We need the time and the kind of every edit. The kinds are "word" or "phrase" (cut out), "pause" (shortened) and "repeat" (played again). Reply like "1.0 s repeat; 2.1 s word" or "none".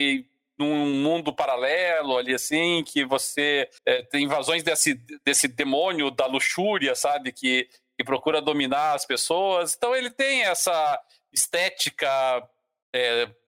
3.8 s pause